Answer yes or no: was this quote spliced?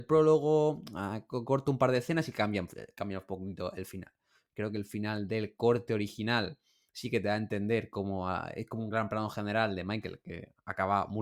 no